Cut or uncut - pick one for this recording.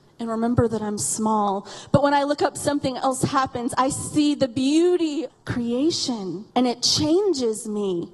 cut